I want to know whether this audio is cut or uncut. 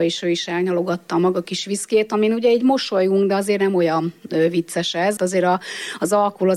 cut